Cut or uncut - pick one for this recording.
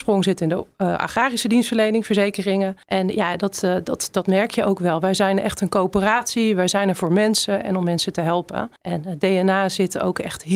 cut